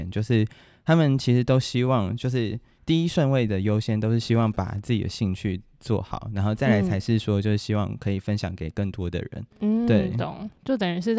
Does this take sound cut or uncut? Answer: cut